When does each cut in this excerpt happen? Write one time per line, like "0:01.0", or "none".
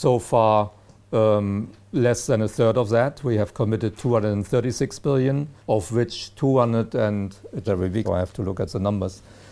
0:01.8
0:05.6
0:07.6
0:08.0